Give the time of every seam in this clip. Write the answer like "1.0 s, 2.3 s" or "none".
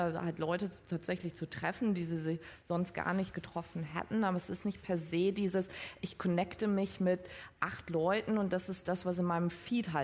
none